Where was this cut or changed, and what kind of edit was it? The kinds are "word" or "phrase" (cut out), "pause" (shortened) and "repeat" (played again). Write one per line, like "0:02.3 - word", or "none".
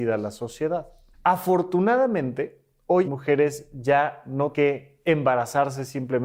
0:01.1 - pause
0:03.0 - phrase
0:04.5 - word